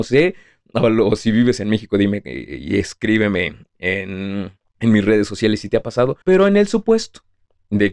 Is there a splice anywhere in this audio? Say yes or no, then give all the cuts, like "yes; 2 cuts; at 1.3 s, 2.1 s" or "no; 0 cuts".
yes; 2 cuts; at 4.6 s, 6.2 s